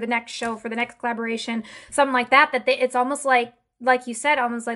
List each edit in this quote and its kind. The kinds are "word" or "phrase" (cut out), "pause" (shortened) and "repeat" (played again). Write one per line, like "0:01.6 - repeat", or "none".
none